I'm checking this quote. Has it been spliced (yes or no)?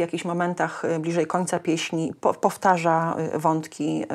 no